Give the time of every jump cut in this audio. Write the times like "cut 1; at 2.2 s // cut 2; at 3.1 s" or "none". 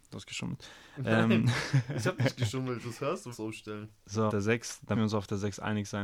cut 1; at 2.8 s // cut 2; at 3.3 s // cut 3; at 4.3 s // cut 4; at 4.9 s